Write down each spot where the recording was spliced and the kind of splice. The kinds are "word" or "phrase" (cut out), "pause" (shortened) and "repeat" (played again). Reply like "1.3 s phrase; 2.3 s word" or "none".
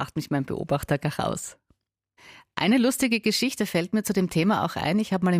none